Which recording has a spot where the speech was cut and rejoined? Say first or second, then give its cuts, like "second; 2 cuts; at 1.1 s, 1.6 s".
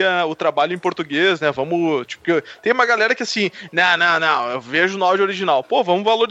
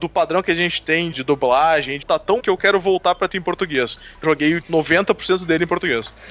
second; 6 cuts; at 1.1 s, 2.0 s, 2.4 s, 3.3 s, 4.2 s, 4.6 s